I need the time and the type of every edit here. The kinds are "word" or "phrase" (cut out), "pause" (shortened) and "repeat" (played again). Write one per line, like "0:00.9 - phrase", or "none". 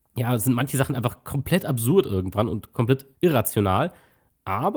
0:03.1 - pause